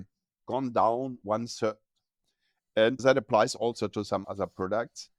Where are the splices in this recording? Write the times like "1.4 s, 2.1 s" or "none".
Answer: 1.2 s, 3.0 s, 4.2 s